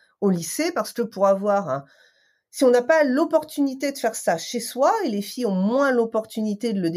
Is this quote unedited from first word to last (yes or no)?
yes